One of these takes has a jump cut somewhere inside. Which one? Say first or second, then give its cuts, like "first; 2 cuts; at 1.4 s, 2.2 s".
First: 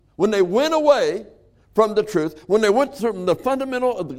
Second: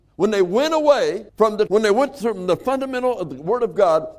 second; 2 cuts; at 1.3 s, 1.7 s